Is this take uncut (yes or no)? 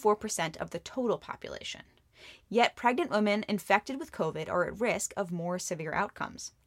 yes